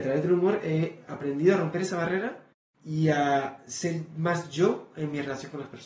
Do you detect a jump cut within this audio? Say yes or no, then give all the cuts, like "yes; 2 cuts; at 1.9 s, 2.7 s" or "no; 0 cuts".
no; 0 cuts